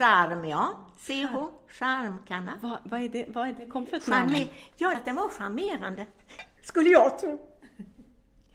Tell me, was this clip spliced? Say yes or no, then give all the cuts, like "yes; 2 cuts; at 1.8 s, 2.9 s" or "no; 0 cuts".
yes; 3 cuts; at 3.9 s, 4.9 s, 6.6 s